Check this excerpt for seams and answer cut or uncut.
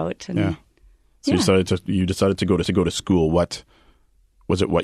cut